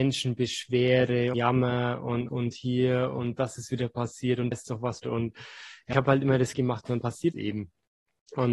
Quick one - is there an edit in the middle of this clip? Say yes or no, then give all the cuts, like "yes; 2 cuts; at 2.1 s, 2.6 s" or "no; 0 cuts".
yes; 7 cuts; at 1.3 s, 2.3 s, 4.5 s, 5.0 s, 5.9 s, 6.5 s, 7.3 s